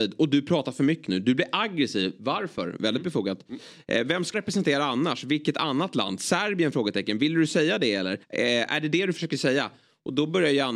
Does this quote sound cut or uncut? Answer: cut